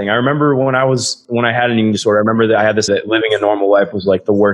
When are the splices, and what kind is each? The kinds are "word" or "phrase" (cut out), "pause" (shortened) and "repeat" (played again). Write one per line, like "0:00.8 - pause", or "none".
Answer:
0:02.9 - word